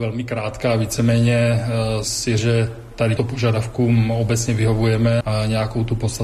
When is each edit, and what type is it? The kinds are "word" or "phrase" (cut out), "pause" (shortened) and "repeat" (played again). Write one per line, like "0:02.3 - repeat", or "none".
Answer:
0:02.0 - word
0:02.4 - word
0:03.2 - word
0:05.2 - word